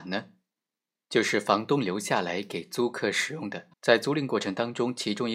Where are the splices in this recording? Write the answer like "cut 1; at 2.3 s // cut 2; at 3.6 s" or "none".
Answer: cut 1; at 3.7 s